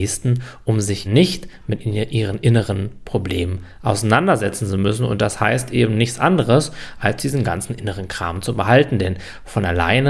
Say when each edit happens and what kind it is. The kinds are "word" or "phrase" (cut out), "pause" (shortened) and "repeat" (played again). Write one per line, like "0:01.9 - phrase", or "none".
0:01.0 - word

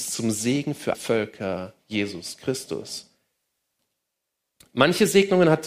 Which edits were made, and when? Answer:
0:00.9 - word

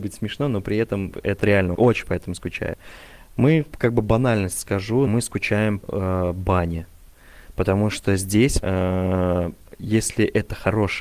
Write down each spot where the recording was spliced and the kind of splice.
0:01.4 - word
0:01.7 - word
0:03.7 - word
0:05.1 - word
0:05.8 - word
0:08.6 - word

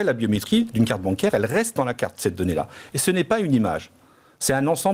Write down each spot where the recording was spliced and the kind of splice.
none

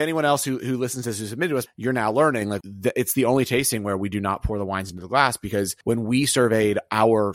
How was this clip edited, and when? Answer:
0:01.7 - word
0:02.6 - word
0:05.8 - pause

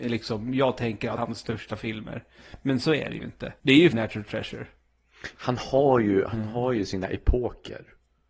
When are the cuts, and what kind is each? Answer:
0:01.2 - phrase
0:03.6 - pause
0:03.9 - word

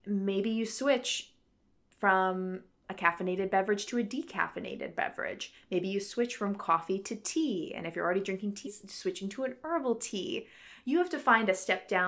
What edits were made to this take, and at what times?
0:08.7 - word

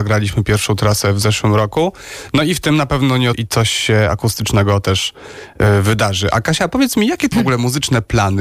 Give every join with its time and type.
0:03.3 - word
0:07.3 - word

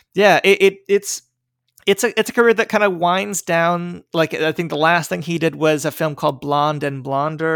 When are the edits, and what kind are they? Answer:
none

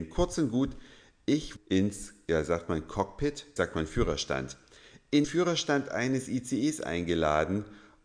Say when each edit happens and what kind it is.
0:01.6 - word
0:03.6 - word
0:05.2 - word

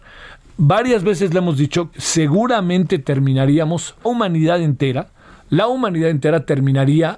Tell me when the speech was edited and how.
0:01.9 - word
0:04.0 - word

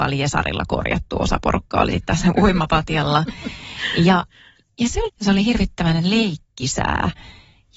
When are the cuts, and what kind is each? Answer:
0:01.9 - phrase
0:05.1 - phrase

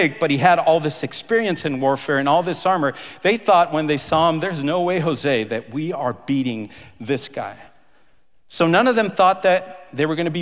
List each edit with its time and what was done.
none

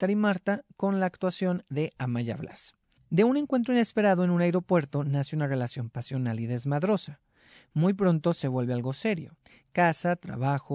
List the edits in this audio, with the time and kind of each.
none

